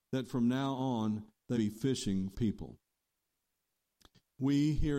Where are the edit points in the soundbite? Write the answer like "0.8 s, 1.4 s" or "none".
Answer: 1.5 s, 2.3 s